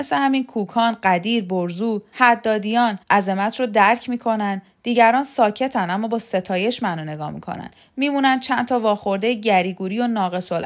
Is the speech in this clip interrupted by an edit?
yes; 1 cut; at 3.0 s

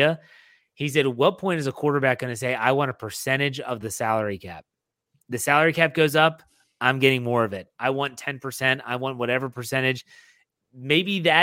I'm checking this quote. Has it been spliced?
no; 0 cuts

